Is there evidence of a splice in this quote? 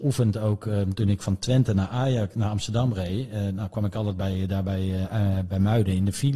no; 0 cuts

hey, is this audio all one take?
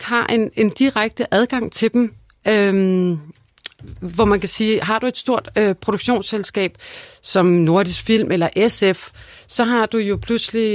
yes; 0 cuts

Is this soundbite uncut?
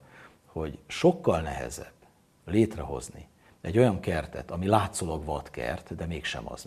yes; 0 cuts

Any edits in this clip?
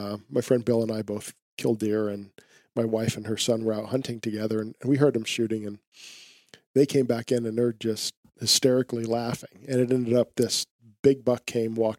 no; 0 cuts

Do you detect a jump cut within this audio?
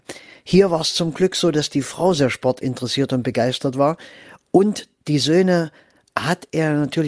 no; 0 cuts

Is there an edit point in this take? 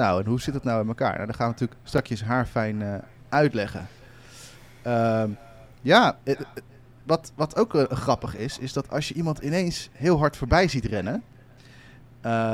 no; 0 cuts

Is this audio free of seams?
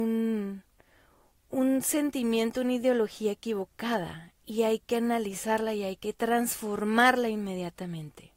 yes; 0 cuts

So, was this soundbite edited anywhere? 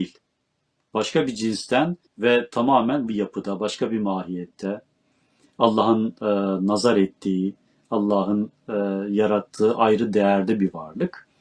yes; 2 cuts; at 2.1 s, 3.1 s

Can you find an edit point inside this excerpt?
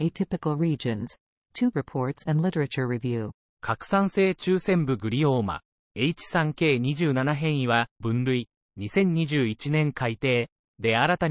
yes; 3 cuts; at 1.7 s, 5.8 s, 8.0 s

